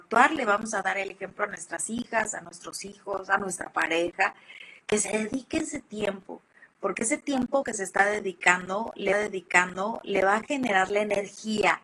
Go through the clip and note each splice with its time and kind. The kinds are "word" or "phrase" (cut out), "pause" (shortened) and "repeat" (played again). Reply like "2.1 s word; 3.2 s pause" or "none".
4.8 s pause; 7.6 s word; 9.1 s repeat